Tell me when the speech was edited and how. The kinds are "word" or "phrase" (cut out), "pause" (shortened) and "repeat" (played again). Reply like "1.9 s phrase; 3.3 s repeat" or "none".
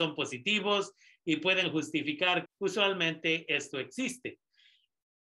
2.5 s phrase